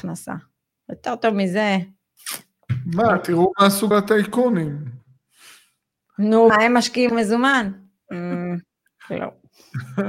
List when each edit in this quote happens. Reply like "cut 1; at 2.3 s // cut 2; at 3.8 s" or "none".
cut 1; at 3.9 s // cut 2; at 6.5 s // cut 3; at 7.1 s